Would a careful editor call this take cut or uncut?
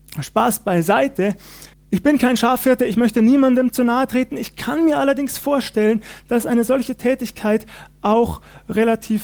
cut